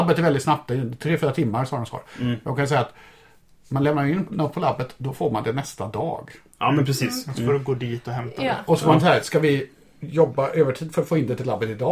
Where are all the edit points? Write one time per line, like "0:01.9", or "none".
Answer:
none